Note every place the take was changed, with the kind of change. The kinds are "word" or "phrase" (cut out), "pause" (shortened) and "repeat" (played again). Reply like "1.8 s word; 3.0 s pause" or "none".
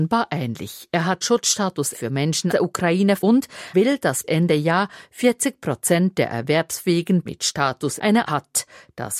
1.2 s word; 1.9 s word; 2.5 s word; 3.2 s word; 3.7 s word; 4.2 s word; 7.3 s word; 8.0 s word; 8.3 s word